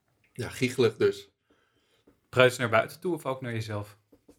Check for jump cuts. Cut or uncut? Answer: uncut